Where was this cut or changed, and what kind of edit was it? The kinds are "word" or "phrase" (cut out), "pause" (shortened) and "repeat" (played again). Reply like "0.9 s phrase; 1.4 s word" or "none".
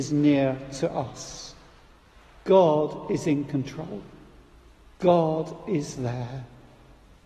none